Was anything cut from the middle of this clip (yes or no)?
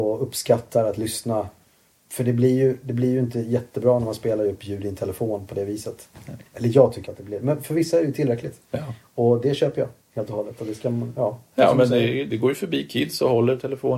yes